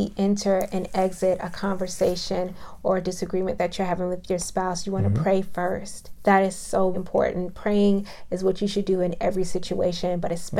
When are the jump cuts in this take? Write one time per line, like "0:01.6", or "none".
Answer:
0:06.9